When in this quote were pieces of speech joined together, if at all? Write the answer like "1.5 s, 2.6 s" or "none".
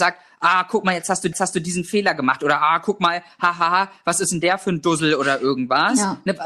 1.3 s

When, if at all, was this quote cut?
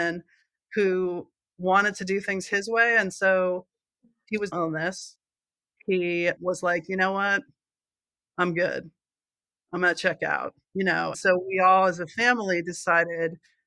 4.5 s, 6.4 s, 10.6 s, 11.1 s

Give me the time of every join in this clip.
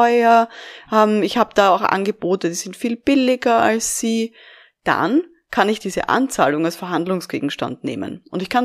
none

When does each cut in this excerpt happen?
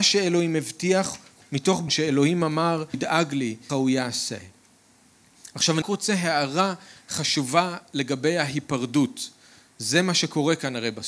1.4 s, 1.9 s, 2.9 s, 3.7 s, 5.8 s

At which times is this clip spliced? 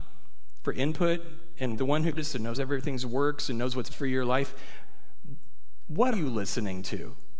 1.8 s, 2.1 s, 2.5 s, 3.9 s, 6.1 s

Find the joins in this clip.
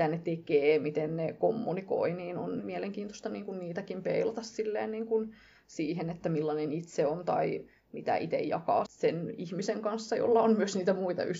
2.6 s, 8.9 s

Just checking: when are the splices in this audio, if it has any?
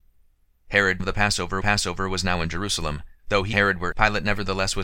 1.0 s, 1.6 s, 3.2 s, 3.5 s, 3.9 s

